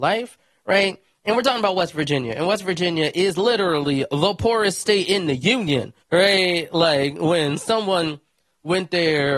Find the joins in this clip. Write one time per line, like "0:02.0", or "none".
0:06.0